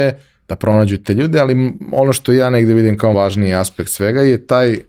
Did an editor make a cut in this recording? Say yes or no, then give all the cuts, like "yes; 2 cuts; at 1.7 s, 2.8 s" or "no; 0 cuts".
yes; 1 cut; at 3.1 s